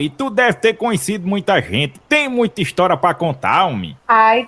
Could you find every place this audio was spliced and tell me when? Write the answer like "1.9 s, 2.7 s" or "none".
none